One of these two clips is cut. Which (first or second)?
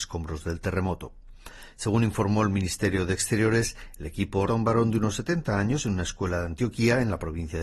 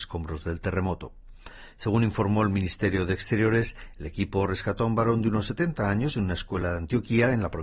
first